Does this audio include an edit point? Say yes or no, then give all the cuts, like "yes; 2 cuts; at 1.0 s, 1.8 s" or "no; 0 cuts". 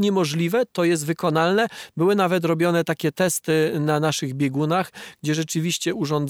no; 0 cuts